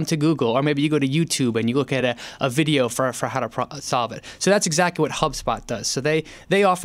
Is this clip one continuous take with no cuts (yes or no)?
yes